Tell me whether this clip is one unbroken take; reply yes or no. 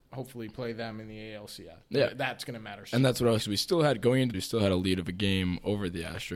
no